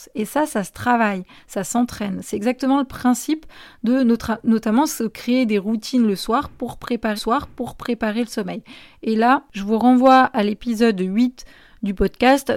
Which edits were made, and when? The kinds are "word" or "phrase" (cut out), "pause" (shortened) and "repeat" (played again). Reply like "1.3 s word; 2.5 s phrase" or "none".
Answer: 7.2 s repeat